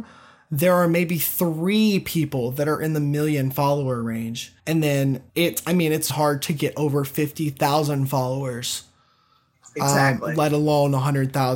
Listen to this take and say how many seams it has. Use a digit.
3